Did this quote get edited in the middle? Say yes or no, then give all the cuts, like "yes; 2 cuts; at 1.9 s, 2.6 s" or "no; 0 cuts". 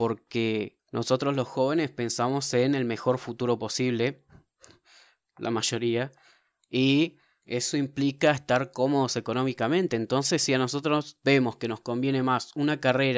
no; 0 cuts